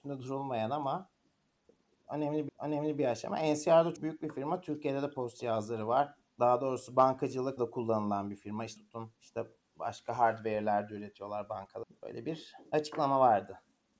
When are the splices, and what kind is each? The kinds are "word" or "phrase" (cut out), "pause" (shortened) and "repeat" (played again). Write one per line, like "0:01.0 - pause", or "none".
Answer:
0:02.5 - repeat
0:04.0 - word
0:06.2 - pause
0:07.6 - phrase
0:08.8 - word
0:09.2 - pause
0:12.7 - pause